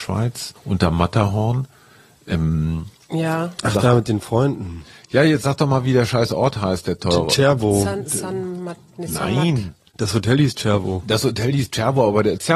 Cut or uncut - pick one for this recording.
uncut